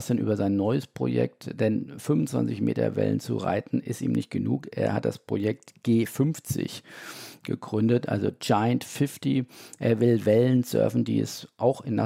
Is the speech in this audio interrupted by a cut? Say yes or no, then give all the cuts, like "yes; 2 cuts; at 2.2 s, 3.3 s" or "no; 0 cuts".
no; 0 cuts